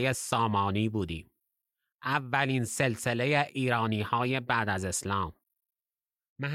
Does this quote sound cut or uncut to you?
uncut